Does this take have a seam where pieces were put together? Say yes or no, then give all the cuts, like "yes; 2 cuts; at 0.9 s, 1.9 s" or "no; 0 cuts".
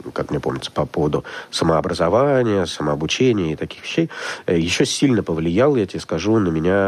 no; 0 cuts